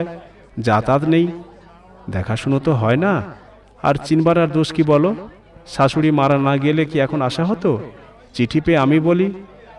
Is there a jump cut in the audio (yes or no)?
no